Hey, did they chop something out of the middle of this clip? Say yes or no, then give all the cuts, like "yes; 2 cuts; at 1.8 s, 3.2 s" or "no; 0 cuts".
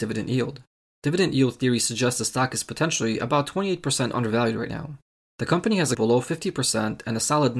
yes; 1 cut; at 5.9 s